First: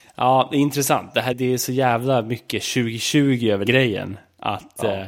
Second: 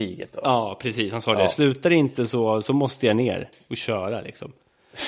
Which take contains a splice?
first; 2 cuts; at 1.3 s, 3.7 s

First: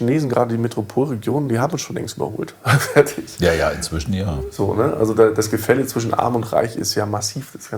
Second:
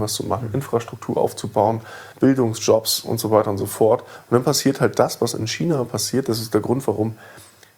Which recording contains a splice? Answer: second; 1 cut; at 2.1 s

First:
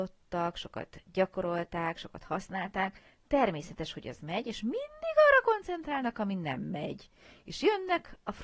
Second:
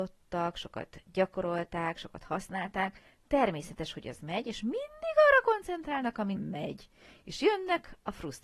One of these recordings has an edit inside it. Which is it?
second; 1 cut; at 6.4 s

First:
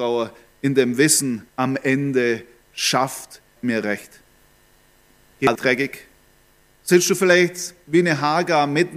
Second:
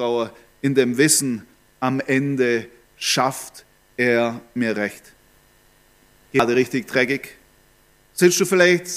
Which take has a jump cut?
first; 3 cuts; at 1.5 s, 3.6 s, 5.5 s

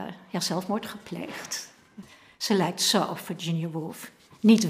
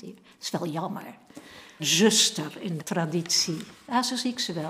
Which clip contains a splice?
second; 2 cuts; at 1.8 s, 2.8 s

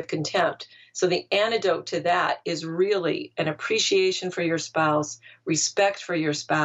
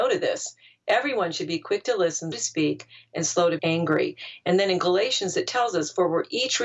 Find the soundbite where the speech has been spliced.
second; 2 cuts; at 2.3 s, 3.6 s

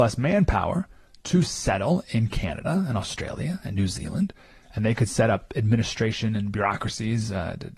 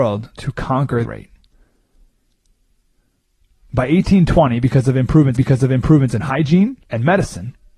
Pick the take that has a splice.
second; 3 cuts; at 1.0 s, 5.4 s, 6.8 s

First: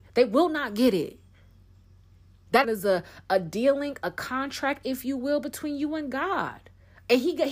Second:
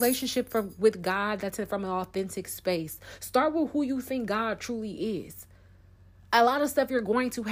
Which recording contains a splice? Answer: first; 1 cut; at 2.6 s

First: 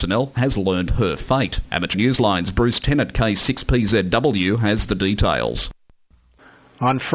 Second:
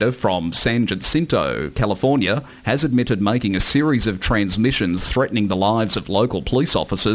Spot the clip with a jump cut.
first; 1 cut; at 1.9 s

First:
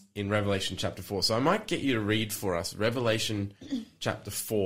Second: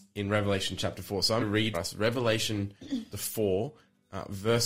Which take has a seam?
second; 3 cuts; at 1.4 s, 1.7 s, 3.1 s

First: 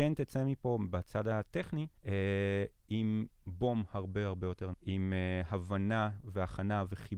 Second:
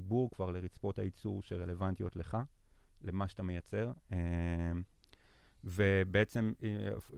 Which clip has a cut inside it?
first; 2 cuts; at 2.0 s, 4.7 s

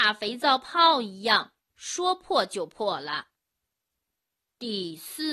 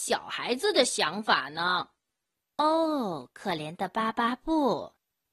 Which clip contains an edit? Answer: second; 1 cut; at 2.3 s

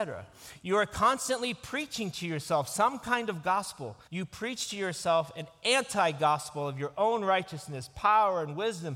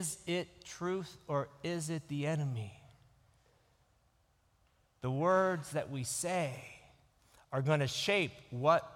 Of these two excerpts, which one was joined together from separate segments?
first; 1 cut; at 4.1 s

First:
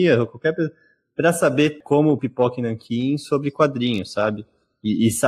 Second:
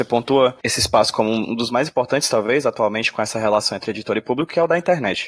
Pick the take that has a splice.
first; 1 cut; at 2.2 s

